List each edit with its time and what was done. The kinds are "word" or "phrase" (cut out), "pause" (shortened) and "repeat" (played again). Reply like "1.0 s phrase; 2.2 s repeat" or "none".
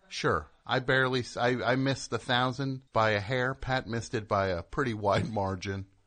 2.9 s pause

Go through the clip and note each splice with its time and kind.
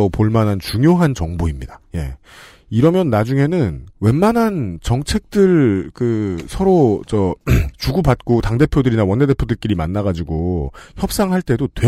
1.9 s pause; 7.7 s pause

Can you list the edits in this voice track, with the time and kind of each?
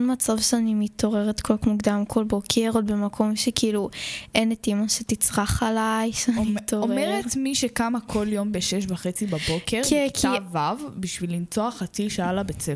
1.6 s word

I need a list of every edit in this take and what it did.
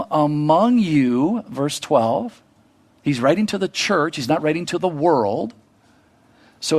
2.7 s pause

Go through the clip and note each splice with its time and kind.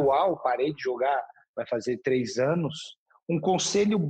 none

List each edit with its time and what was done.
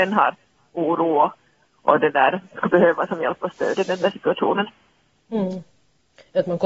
none

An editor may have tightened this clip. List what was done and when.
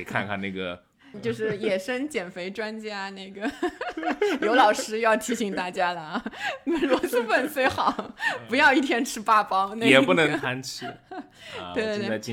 1.1 s phrase

